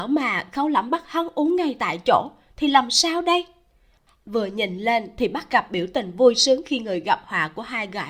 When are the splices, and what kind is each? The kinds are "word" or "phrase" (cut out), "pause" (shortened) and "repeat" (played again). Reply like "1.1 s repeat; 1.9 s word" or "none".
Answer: none

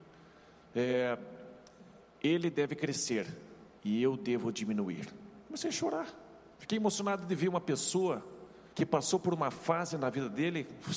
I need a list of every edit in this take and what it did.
3.8 s pause; 5.5 s pause; 6.5 s pause; 8.7 s pause

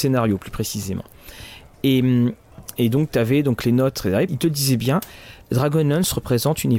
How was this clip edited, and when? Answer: 4.3 s word; 5.4 s pause

